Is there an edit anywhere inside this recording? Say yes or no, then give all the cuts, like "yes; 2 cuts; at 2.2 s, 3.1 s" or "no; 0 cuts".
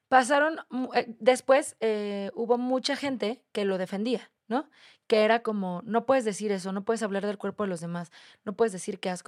yes; 1 cut; at 4.4 s